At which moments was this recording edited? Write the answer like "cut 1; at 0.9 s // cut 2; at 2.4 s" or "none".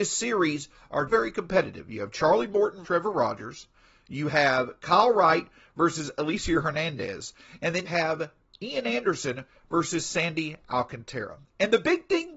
cut 1; at 1.1 s // cut 2; at 2.8 s // cut 3; at 7.9 s